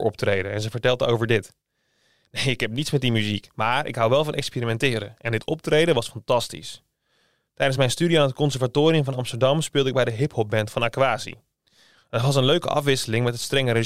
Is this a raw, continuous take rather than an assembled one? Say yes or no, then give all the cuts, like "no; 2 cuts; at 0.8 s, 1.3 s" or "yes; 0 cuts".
yes; 0 cuts